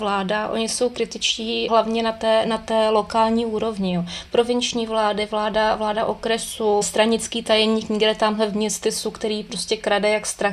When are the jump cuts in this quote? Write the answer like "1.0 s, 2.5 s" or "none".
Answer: 1.7 s, 6.8 s